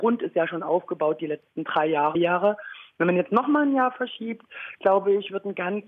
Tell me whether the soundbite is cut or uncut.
cut